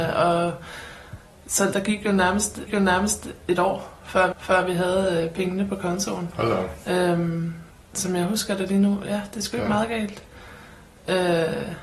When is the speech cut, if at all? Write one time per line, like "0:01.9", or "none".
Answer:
0:01.7
0:02.7
0:04.3
0:07.7